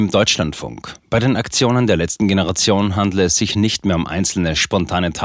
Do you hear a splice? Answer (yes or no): no